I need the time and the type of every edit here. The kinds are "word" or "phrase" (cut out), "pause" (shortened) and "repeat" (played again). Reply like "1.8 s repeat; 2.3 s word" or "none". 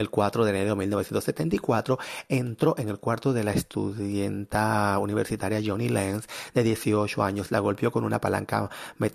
none